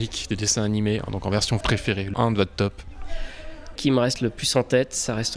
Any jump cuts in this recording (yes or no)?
yes